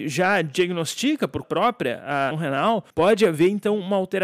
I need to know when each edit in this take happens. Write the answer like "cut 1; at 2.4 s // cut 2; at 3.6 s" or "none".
cut 1; at 1.4 s // cut 2; at 2.3 s // cut 3; at 2.9 s

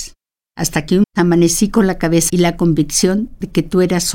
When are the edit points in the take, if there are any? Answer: cut 1; at 1.0 s // cut 2; at 2.3 s

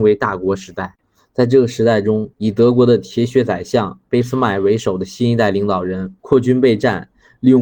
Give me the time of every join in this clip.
cut 1; at 1.0 s // cut 2; at 2.3 s // cut 3; at 6.2 s

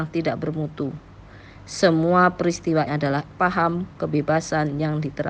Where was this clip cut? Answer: cut 1; at 2.9 s // cut 2; at 3.3 s

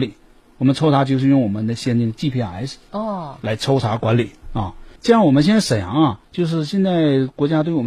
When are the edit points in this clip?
cut 1; at 5.0 s // cut 2; at 6.2 s

